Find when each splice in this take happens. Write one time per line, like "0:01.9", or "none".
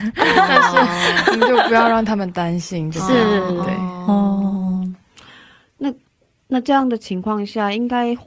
none